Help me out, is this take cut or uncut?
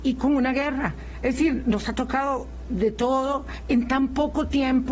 uncut